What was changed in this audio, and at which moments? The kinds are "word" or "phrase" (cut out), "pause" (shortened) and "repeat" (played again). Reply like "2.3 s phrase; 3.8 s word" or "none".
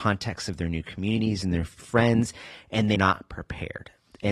1.8 s word; 2.9 s word